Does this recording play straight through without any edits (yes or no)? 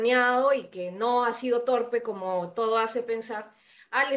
yes